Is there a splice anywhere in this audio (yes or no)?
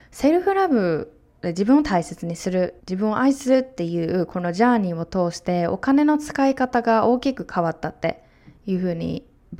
yes